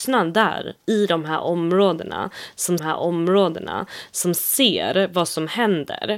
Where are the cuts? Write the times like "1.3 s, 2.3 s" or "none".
2.8 s